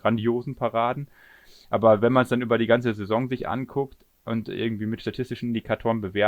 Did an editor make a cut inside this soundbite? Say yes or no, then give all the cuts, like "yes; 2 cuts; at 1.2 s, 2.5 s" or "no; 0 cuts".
no; 0 cuts